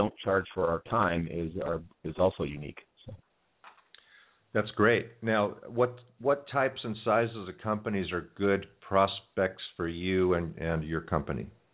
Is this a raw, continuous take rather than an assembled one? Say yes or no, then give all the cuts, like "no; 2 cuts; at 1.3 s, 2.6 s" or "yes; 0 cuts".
yes; 0 cuts